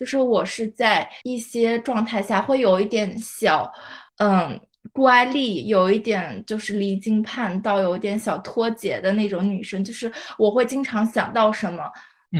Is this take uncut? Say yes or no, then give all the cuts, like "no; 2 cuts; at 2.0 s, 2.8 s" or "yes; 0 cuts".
no; 2 cuts; at 1.2 s, 4.1 s